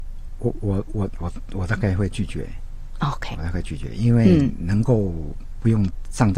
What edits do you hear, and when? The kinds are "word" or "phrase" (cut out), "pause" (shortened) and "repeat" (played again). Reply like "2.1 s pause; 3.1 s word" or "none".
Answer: 3.3 s word